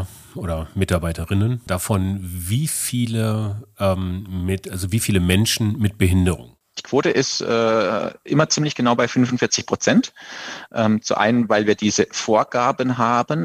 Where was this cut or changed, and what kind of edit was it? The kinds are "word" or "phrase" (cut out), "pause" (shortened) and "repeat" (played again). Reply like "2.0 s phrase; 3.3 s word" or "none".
none